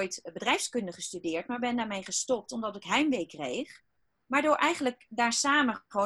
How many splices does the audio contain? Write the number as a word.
one